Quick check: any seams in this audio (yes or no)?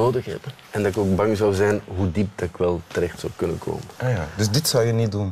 no